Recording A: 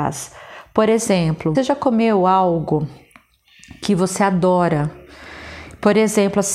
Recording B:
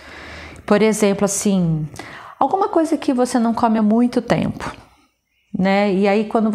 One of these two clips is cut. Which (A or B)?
A